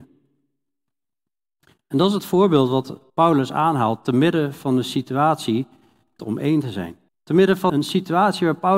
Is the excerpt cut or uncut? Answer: cut